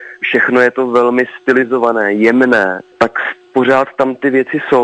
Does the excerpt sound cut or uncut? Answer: uncut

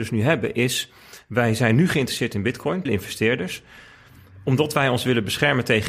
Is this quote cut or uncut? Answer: cut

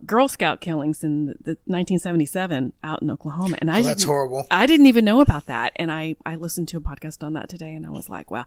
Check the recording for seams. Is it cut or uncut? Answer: uncut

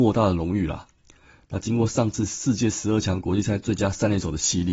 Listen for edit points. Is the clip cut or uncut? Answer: uncut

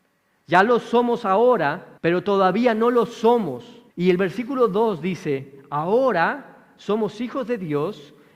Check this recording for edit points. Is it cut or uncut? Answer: cut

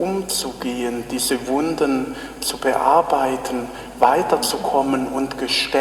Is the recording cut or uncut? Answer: uncut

